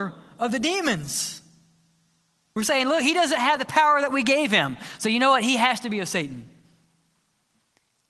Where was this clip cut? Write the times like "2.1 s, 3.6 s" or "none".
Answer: none